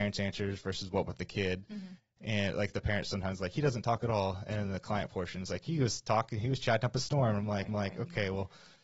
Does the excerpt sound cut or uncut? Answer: cut